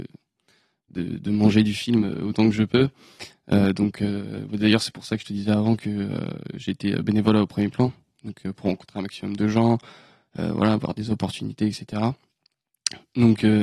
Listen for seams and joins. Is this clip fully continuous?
yes; 0 cuts

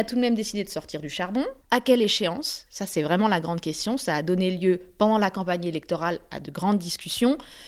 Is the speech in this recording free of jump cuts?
no; 1 cut; at 1.6 s

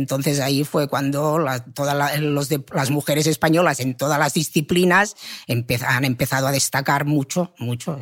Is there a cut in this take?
no; 0 cuts

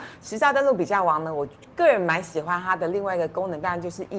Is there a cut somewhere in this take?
no; 0 cuts

